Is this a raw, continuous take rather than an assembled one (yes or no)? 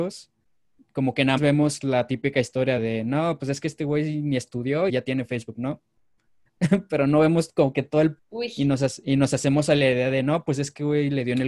no